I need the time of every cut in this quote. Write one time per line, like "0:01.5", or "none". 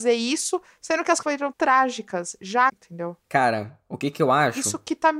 0:01.2
0:01.5
0:02.7